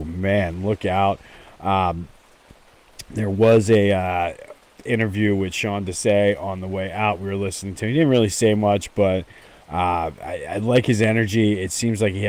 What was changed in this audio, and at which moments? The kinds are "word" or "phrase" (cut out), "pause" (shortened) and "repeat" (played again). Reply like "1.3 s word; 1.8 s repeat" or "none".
none